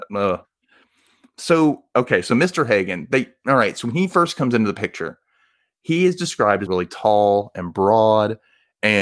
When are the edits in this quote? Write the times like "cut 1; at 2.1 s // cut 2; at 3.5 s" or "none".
cut 1; at 6.7 s